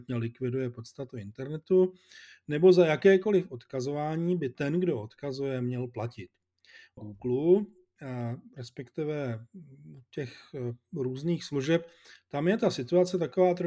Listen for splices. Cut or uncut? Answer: cut